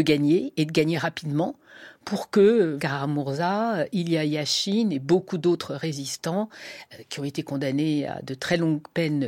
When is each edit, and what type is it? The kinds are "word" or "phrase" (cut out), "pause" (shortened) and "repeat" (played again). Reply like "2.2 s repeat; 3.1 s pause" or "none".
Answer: 2.8 s word